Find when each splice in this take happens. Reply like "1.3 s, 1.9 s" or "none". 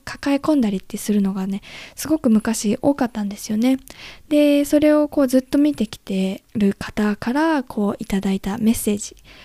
6.5 s

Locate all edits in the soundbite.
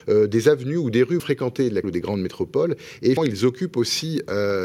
1.2 s, 1.8 s, 3.2 s

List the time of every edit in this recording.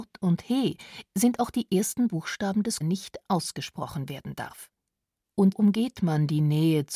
2.1 s, 2.8 s, 5.5 s

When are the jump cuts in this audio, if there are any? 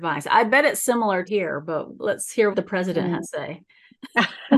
1.3 s, 2.0 s, 2.5 s, 3.2 s

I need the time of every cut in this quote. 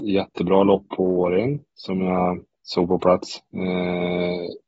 2.5 s

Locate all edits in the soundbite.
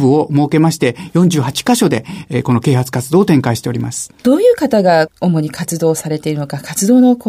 4.2 s, 5.1 s

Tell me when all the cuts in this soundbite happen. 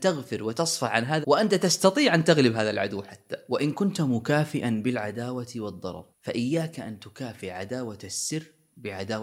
1.2 s, 6.1 s

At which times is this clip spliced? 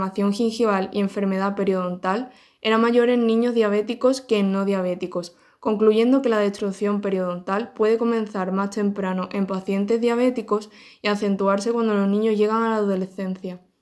none

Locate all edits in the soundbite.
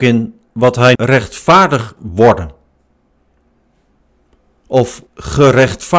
0.9 s, 2.0 s, 5.1 s

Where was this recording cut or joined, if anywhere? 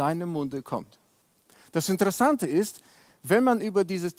none

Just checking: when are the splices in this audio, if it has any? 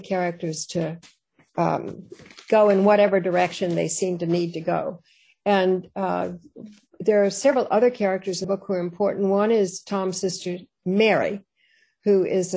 8.4 s

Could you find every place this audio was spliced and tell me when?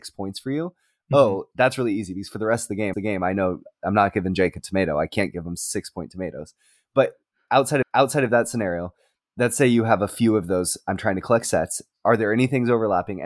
2.9 s, 7.8 s

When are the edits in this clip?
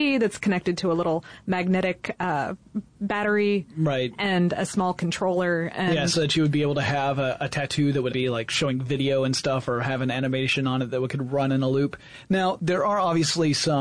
8.1 s

